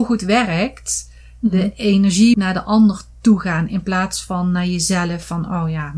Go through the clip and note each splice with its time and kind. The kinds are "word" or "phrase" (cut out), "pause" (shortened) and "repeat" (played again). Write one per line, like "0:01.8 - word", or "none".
0:02.3 - word